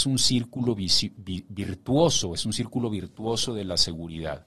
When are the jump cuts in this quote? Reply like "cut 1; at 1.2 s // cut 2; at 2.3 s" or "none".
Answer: none